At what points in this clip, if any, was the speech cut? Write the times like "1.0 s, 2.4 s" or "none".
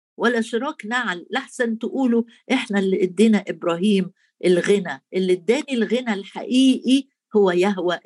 none